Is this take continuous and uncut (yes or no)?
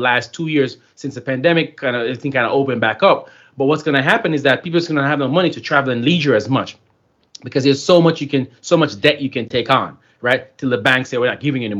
yes